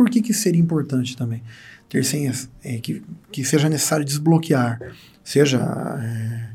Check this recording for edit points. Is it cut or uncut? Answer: uncut